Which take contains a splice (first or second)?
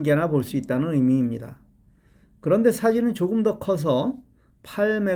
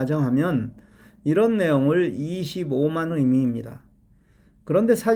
second